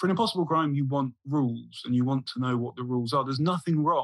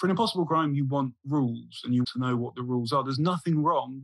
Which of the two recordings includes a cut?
second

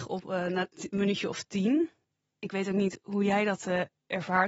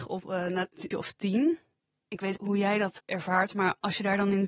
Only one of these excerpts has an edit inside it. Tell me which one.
second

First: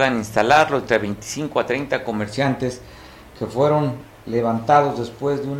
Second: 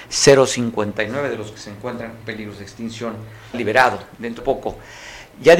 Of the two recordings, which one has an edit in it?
second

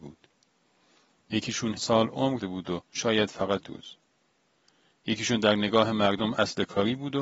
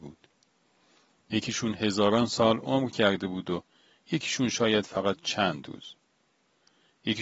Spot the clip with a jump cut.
first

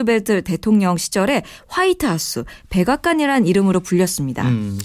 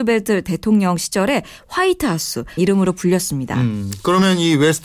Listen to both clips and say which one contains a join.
second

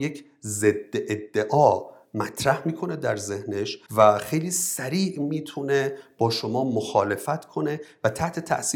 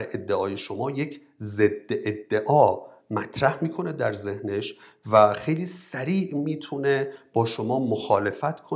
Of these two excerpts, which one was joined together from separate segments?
first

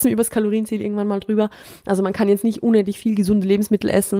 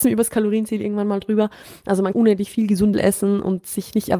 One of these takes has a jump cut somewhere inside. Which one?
second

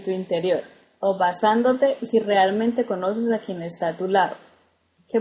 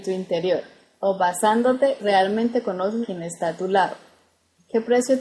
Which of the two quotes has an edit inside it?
second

